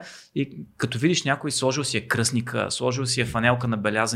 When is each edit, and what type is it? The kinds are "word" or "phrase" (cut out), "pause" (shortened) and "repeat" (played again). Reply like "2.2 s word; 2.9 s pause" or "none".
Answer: none